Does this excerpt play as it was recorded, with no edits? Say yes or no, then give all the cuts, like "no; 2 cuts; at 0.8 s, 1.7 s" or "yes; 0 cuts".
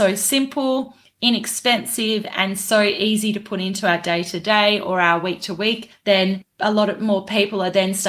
yes; 0 cuts